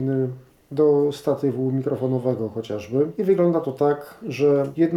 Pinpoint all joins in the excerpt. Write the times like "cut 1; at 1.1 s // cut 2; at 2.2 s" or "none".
none